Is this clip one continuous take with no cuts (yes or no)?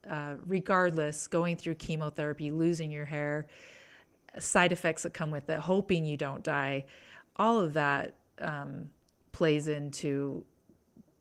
yes